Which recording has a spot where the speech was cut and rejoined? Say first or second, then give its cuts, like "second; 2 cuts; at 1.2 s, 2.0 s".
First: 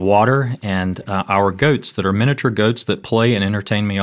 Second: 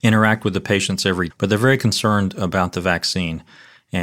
second; 1 cut; at 1.3 s